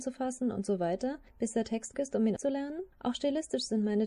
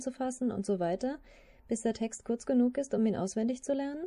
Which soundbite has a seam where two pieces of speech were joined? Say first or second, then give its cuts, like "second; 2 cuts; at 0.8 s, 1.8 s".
first; 4 cuts; at 1.3 s, 1.9 s, 2.4 s, 2.9 s